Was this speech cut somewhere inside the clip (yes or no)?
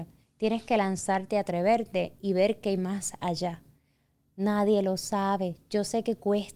no